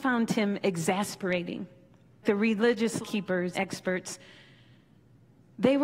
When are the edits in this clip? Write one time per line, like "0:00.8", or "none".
0:02.2
0:03.0
0:03.5